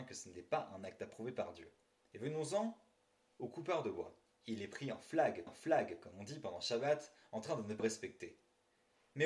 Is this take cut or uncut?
cut